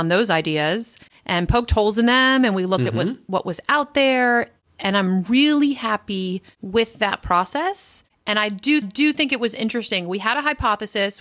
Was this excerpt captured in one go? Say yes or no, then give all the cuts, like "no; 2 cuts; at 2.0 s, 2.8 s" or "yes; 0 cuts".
no; 1 cut; at 8.8 s